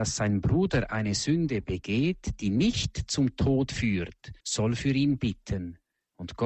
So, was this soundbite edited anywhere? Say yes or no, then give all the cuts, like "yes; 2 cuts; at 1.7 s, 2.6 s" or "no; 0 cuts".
yes; 1 cut; at 4.4 s